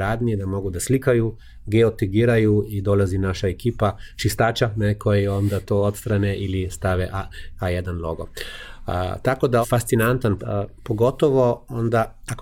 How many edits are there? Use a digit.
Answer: 2